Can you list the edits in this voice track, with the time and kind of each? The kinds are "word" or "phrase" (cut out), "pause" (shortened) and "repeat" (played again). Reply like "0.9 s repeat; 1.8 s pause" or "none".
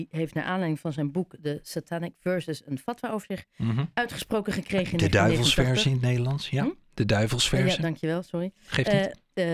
none